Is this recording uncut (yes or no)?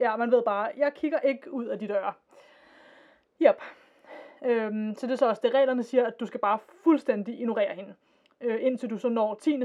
yes